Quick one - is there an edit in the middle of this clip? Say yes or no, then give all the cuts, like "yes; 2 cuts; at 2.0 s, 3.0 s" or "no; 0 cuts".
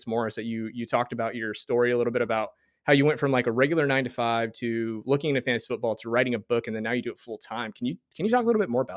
no; 0 cuts